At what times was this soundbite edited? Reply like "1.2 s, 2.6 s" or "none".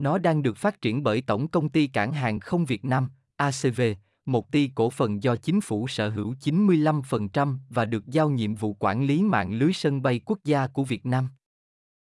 4.5 s

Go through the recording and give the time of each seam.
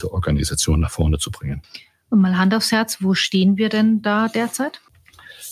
none

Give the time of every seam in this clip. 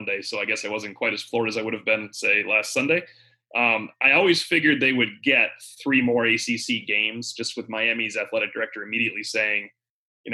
none

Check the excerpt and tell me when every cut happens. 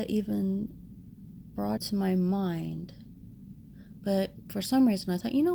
1.8 s

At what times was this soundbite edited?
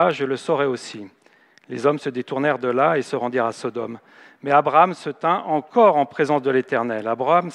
none

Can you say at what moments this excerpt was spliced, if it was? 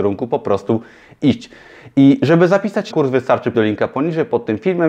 2.9 s, 3.5 s

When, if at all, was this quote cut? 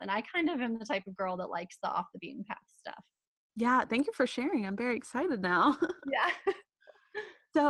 none

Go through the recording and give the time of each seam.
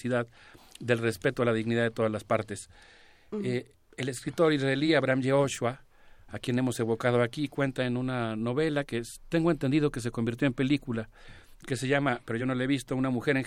none

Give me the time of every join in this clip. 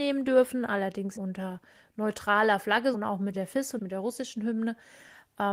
1.2 s, 2.9 s, 3.3 s, 3.8 s

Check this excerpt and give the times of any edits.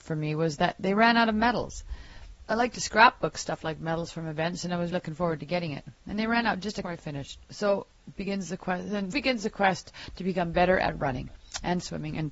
2.5 s, 4.9 s, 6.8 s, 7.4 s, 9.1 s

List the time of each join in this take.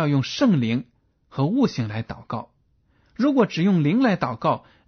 none

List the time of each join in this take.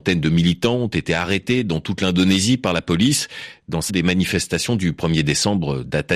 3.9 s

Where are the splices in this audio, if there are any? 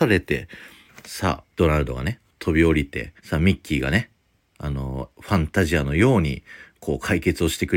1.5 s, 3.2 s

